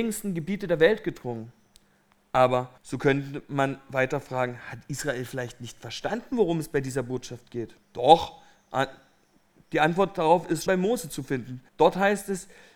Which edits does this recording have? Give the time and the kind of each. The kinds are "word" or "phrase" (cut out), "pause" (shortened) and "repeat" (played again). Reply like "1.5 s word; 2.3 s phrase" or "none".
2.8 s pause; 7.8 s pause; 10.7 s word; 11.7 s pause